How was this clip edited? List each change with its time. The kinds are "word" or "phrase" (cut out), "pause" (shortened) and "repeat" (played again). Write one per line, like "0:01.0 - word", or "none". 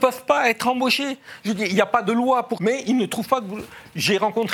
0:02.6 - word